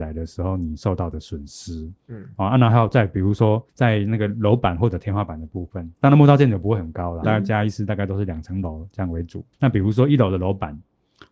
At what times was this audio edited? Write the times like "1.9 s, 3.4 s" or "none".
2.0 s, 3.7 s, 7.2 s, 9.5 s